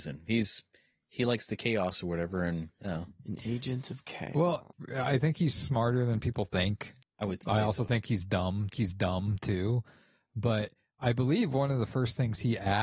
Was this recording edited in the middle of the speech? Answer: yes; 1 cut; at 8.7 s

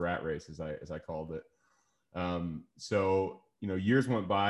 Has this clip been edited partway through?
no; 0 cuts

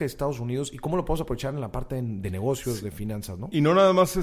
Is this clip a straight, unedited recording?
yes; 0 cuts

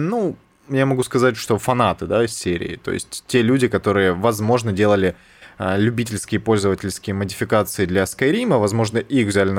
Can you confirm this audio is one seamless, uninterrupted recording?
yes; 0 cuts

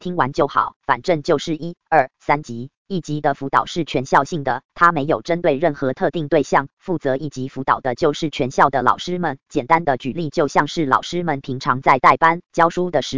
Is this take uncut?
no; 1 cut; at 2.8 s

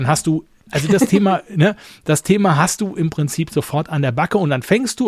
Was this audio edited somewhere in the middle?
no; 0 cuts

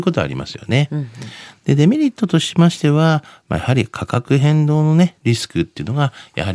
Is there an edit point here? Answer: no; 0 cuts

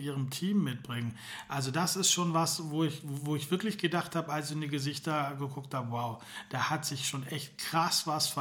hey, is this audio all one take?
yes; 0 cuts

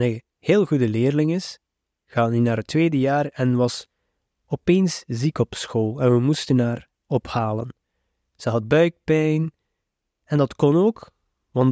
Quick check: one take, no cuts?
yes; 0 cuts

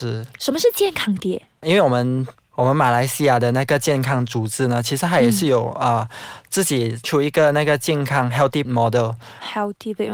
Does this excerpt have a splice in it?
yes; 2 cuts; at 7.0 s, 8.6 s

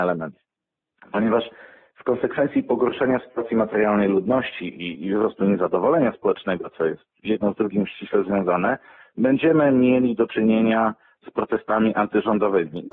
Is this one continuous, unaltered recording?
yes; 0 cuts

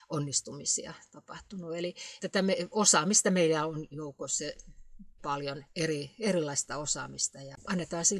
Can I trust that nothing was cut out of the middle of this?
no; 3 cuts; at 2.2 s, 5.2 s, 5.7 s

